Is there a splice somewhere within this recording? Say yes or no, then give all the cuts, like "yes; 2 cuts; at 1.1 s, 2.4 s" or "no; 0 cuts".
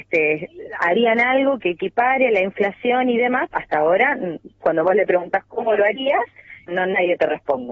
yes; 2 cuts; at 3.5 s, 6.7 s